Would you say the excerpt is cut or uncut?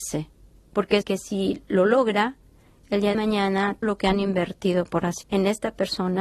cut